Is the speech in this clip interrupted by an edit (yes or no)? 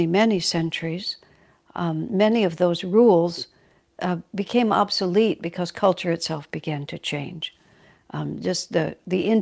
no